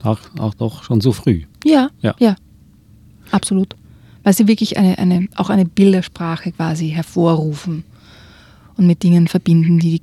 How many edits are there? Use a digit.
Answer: 0